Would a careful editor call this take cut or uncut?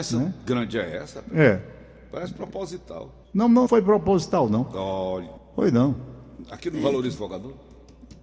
cut